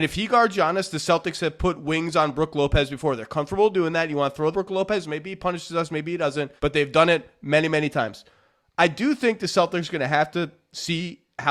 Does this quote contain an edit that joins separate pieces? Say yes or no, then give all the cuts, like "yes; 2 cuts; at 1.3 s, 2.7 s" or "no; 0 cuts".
yes; 2 cuts; at 4.5 s, 6.6 s